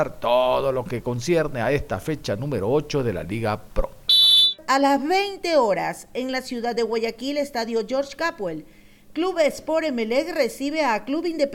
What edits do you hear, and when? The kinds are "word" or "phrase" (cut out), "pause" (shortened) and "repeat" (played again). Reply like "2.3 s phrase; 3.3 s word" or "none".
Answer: none